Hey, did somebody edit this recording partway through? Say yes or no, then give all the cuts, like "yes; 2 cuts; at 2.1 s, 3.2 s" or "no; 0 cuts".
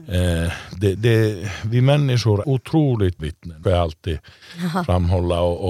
yes; 4 cuts; at 1.0 s, 2.4 s, 3.2 s, 3.6 s